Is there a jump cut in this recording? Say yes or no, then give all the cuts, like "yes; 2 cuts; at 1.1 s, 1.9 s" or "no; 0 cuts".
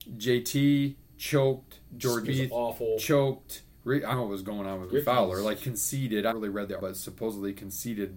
yes; 6 cuts; at 2.2 s, 4.1 s, 4.9 s, 5.6 s, 6.3 s, 6.8 s